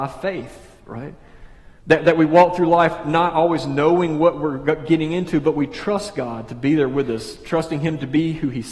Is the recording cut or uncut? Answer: cut